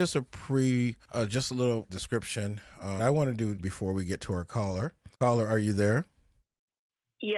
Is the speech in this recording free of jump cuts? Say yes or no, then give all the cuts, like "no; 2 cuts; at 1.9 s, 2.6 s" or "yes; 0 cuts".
no; 5 cuts; at 1.0 s, 1.9 s, 3.0 s, 3.6 s, 5.1 s